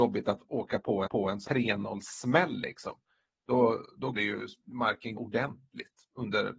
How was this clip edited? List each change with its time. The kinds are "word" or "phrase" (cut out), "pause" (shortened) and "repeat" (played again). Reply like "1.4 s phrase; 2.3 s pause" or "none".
1.1 s repeat; 1.5 s word; 4.1 s word; 5.2 s word

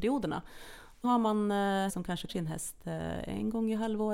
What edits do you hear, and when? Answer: 1.0 s word; 1.9 s word; 2.3 s word

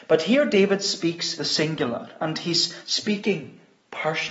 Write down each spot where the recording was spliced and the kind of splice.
1.4 s word

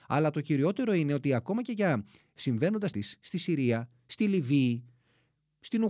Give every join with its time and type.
2.9 s word

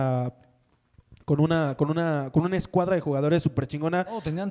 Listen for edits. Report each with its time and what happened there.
none

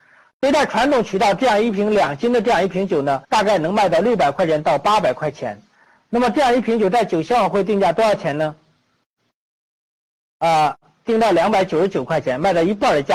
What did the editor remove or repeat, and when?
3.2 s pause

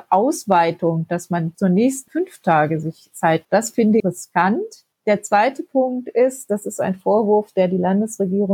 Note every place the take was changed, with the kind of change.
1.5 s word; 2.1 s phrase; 3.4 s word; 4.0 s word; 4.9 s pause

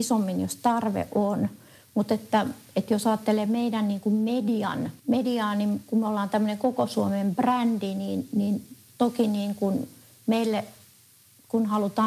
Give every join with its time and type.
5.0 s pause

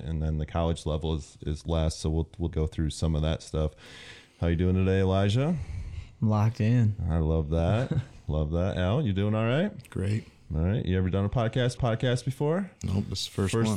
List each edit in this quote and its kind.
2.5 s word; 11.8 s repeat

